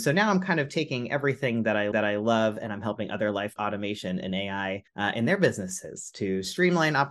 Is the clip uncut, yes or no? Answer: no